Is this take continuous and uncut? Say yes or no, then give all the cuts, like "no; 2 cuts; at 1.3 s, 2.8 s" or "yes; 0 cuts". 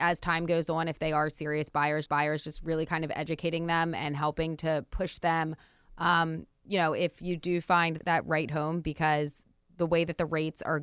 no; 2 cuts; at 2.1 s, 8.0 s